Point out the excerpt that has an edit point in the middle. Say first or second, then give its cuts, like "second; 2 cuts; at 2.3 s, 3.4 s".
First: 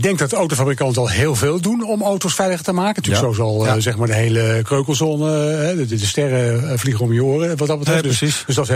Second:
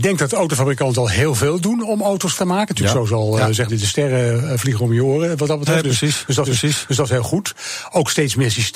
second; 3 cuts; at 2.4 s, 3.7 s, 6.5 s